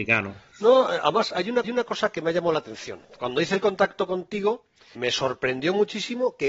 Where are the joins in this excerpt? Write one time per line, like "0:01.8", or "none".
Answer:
0:01.6
0:05.0